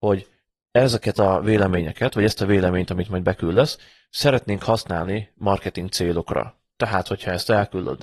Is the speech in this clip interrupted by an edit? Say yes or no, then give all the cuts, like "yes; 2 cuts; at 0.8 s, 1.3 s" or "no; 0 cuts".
no; 0 cuts